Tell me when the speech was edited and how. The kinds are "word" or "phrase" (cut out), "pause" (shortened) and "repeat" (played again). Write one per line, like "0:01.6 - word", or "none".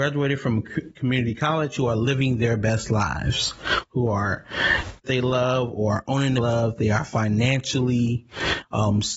0:05.0 - phrase
0:06.4 - phrase